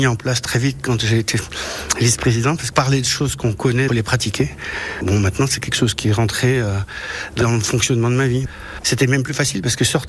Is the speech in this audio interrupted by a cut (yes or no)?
yes